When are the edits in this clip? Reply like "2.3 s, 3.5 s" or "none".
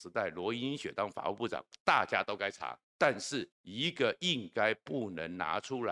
2.9 s, 3.5 s